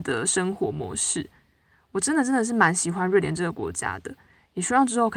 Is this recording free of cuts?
yes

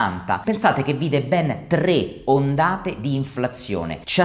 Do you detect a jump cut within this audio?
no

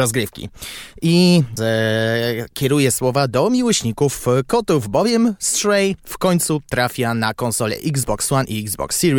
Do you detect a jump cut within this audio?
yes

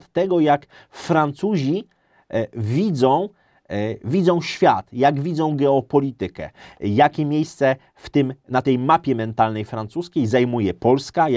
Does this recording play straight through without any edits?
yes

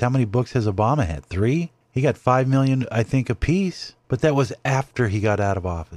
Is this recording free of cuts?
no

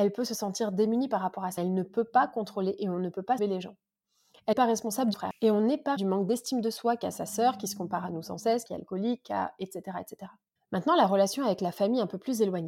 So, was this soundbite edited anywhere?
yes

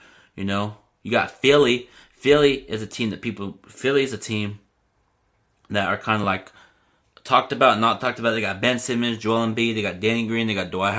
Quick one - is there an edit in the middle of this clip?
no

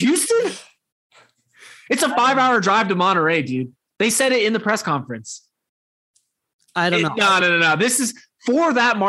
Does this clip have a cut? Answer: no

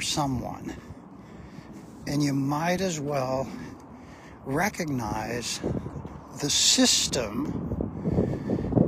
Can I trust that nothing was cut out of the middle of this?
yes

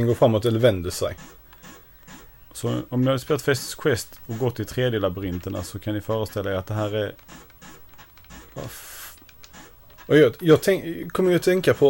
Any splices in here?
no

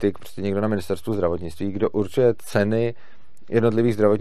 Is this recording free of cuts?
yes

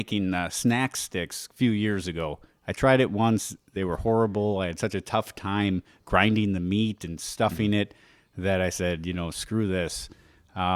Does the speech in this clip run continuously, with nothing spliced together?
yes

